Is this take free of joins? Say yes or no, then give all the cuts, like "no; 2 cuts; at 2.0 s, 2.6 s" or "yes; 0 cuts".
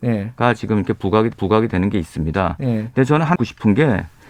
no; 2 cuts; at 1.3 s, 3.4 s